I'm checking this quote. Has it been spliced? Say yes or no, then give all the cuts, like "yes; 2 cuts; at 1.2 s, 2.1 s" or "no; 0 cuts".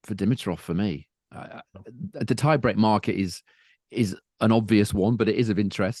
no; 0 cuts